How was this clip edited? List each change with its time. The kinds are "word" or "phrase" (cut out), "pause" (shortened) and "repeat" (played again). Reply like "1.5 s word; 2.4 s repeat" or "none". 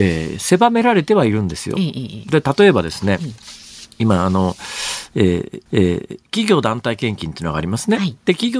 3.9 s pause; 5.7 s repeat